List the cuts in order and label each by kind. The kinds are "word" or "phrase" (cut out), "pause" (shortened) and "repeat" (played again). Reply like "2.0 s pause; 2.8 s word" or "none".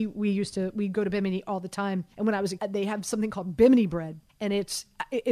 2.1 s pause; 2.6 s word; 4.3 s pause